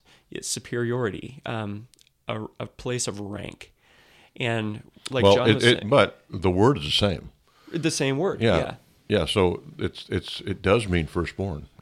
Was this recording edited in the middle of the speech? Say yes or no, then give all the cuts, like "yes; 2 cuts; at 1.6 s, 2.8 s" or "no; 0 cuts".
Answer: no; 0 cuts